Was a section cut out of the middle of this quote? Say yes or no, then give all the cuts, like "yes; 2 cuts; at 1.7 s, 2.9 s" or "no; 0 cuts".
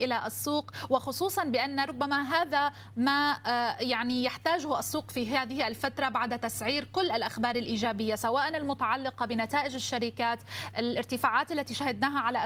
no; 0 cuts